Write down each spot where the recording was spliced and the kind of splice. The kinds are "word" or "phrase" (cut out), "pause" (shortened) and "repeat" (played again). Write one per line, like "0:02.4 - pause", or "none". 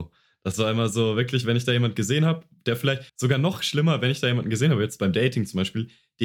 0:03.1 - pause